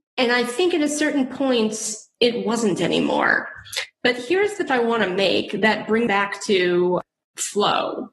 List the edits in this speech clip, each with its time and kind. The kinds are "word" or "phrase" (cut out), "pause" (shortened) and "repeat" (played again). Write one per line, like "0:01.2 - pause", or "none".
0:04.7 - word
0:06.1 - word